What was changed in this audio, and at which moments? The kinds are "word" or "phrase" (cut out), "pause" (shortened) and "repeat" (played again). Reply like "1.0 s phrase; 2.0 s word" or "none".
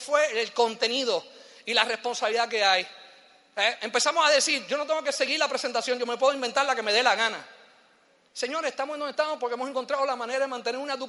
none